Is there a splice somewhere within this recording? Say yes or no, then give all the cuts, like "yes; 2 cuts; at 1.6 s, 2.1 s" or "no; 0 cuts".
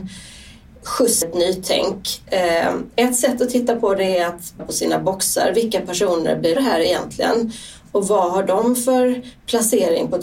yes; 3 cuts; at 1.2 s, 4.6 s, 6.6 s